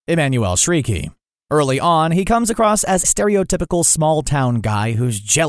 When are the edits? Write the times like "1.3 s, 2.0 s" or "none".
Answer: 3.0 s